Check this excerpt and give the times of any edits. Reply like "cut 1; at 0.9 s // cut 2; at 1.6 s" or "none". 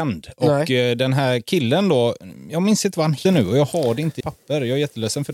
cut 1; at 3.2 s // cut 2; at 4.2 s